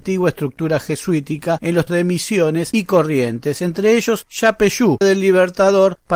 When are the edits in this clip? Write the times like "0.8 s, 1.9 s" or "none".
1.9 s, 5.0 s